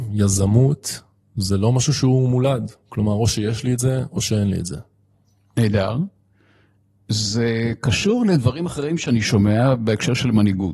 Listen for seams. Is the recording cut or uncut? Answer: uncut